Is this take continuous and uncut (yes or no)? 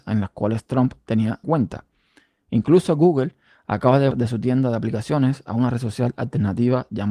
no